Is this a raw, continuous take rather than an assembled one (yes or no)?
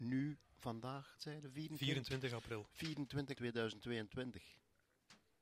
no